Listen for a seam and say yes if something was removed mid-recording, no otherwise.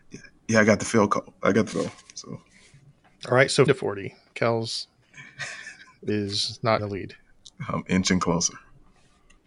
yes